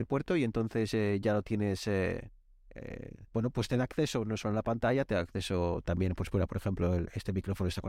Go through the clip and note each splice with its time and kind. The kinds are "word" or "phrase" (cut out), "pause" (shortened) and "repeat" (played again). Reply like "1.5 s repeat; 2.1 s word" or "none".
3.3 s pause